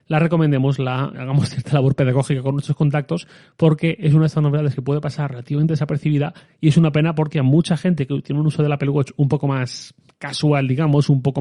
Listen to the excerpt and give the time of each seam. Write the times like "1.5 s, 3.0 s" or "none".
1.1 s